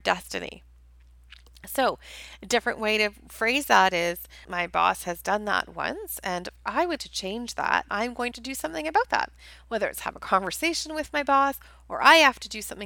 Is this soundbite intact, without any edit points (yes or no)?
no